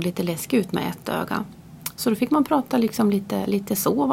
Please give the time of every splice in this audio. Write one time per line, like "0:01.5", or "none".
none